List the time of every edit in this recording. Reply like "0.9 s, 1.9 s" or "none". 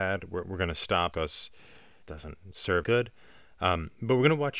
1.1 s, 2.0 s, 2.8 s